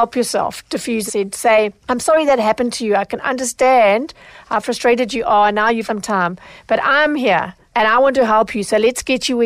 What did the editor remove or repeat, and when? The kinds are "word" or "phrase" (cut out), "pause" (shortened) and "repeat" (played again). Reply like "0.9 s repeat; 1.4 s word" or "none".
1.1 s phrase; 2.0 s word; 5.9 s word